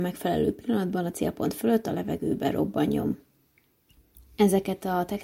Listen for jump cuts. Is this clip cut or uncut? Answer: uncut